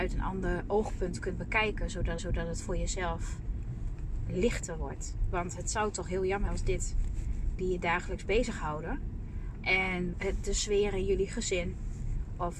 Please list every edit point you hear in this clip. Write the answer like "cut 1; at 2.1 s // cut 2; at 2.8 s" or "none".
cut 1; at 2.2 s // cut 2; at 6.5 s // cut 3; at 7.6 s // cut 4; at 10.1 s